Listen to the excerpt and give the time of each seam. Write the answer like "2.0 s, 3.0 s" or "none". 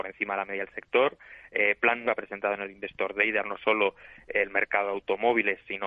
2.1 s, 3.4 s